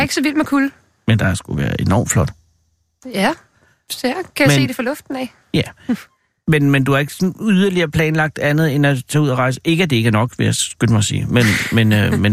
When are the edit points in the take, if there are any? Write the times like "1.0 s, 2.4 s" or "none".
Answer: none